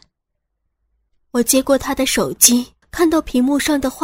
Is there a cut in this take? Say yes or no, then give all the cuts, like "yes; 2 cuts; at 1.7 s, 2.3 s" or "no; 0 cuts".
yes; 1 cut; at 2.8 s